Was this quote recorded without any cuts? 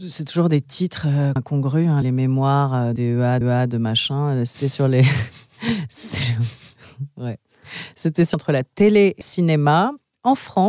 no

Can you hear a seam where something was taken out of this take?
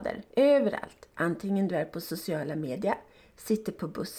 no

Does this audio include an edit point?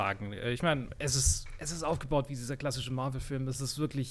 no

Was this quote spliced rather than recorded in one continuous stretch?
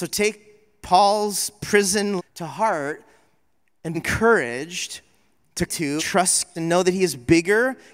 yes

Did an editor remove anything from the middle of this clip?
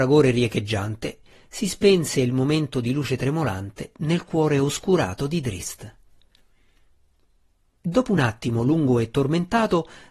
no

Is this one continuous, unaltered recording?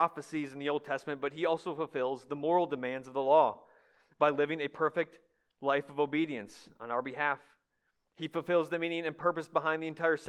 yes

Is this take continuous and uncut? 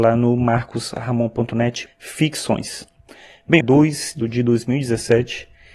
no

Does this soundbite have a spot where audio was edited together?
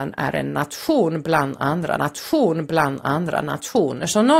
yes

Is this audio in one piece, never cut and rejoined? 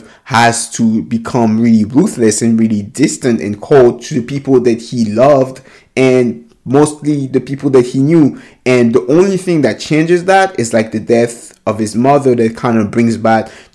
yes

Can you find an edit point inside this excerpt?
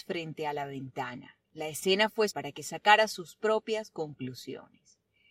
yes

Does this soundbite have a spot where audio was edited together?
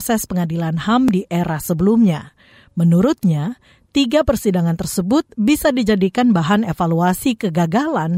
no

